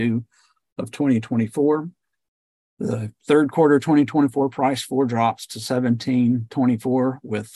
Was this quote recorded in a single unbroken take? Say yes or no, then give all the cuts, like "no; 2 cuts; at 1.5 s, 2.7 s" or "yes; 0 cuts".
yes; 0 cuts